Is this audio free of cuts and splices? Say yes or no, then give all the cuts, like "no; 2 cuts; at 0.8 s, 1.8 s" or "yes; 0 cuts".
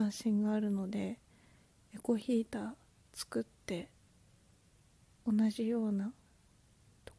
yes; 0 cuts